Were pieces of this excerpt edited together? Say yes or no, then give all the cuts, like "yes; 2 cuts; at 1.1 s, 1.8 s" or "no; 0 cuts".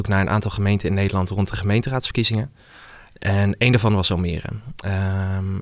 no; 0 cuts